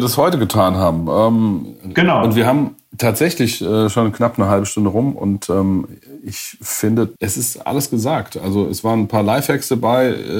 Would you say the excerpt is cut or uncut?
cut